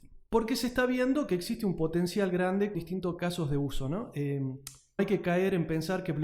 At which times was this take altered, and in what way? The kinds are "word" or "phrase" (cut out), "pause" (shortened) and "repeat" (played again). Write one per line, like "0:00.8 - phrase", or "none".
0:02.7 - word
0:05.0 - word